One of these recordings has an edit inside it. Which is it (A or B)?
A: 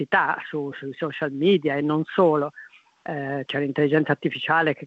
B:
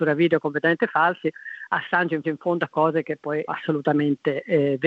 B